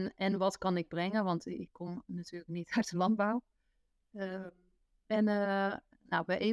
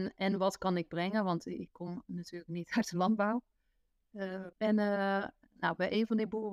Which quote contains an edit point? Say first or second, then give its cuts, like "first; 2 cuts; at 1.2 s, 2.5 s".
second; 1 cut; at 4.5 s